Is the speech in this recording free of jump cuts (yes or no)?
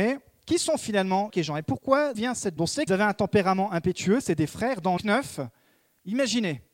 no